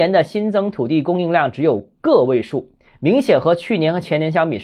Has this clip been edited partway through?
no; 0 cuts

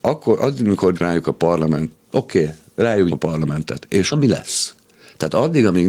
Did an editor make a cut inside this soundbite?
yes; 4 cuts; at 0.9 s, 1.9 s, 3.1 s, 4.1 s

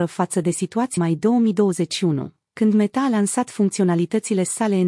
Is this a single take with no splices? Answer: no; 1 cut; at 1.0 s

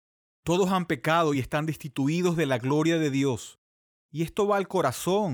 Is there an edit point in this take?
no; 0 cuts

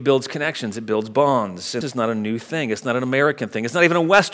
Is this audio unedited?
no; 1 cut; at 1.8 s

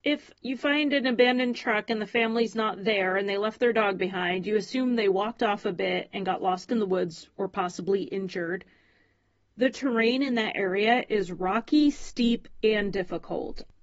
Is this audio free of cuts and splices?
yes; 0 cuts

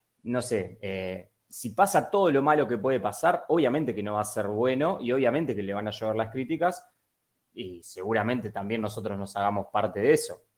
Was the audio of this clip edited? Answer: no; 0 cuts

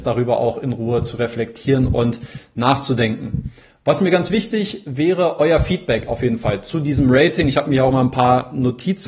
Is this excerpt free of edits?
yes; 0 cuts

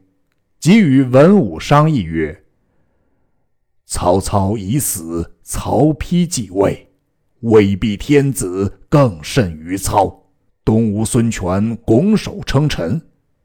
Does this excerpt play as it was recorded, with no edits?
no; 1 cut; at 10.5 s

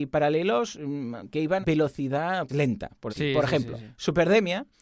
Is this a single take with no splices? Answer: no; 4 cuts; at 1.6 s, 2.5 s, 3.1 s, 3.8 s

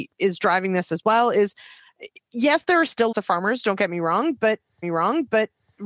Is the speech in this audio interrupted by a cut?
yes; 2 cuts; at 3.1 s, 4.8 s

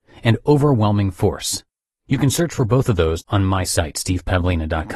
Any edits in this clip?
no; 0 cuts

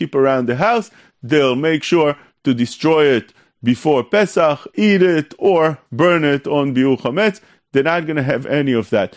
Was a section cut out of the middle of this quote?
no; 0 cuts

